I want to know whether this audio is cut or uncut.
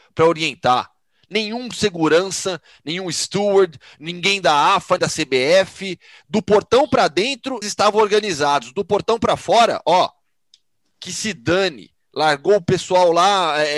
cut